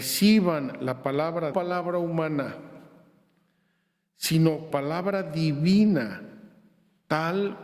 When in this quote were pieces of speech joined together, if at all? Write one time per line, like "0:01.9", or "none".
0:01.5
0:04.7

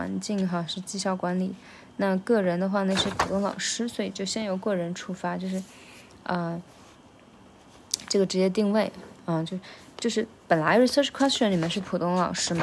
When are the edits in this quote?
none

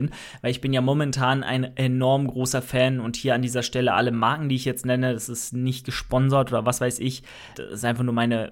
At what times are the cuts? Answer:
0:07.5

